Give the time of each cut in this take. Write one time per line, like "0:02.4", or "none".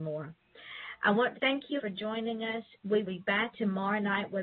0:01.3
0:01.8
0:03.0
0:03.5